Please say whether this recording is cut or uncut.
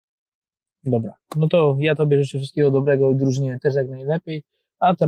uncut